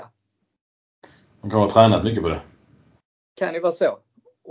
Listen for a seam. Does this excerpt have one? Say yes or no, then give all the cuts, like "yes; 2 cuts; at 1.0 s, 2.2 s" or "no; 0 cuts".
no; 0 cuts